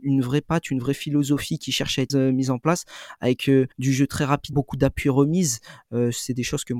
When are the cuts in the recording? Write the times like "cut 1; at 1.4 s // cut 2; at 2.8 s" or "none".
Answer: cut 1; at 1.6 s // cut 2; at 2.1 s // cut 3; at 3.7 s // cut 4; at 4.5 s